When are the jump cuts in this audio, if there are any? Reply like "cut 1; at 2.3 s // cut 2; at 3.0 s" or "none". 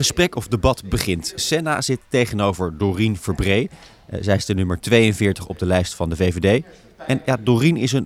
none